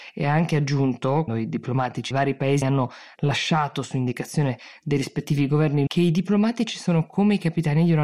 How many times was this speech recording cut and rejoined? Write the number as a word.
four